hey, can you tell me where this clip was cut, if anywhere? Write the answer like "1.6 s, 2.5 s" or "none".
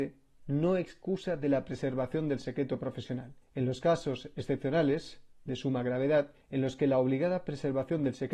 3.4 s, 6.4 s